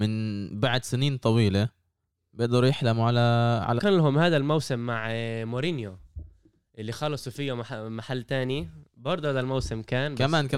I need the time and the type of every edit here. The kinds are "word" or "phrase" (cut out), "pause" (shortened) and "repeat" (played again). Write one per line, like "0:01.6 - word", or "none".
0:03.8 - phrase